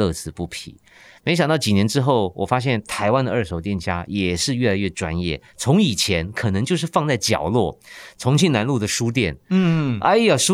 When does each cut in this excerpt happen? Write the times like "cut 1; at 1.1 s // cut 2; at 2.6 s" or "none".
none